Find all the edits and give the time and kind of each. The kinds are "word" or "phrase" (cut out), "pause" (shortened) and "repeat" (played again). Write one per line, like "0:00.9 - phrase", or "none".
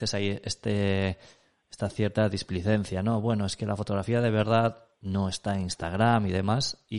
none